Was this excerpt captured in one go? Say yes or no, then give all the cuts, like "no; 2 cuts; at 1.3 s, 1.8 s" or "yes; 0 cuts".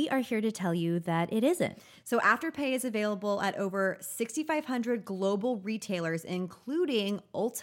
yes; 0 cuts